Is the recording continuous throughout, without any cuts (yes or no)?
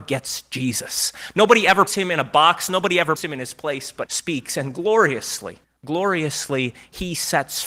no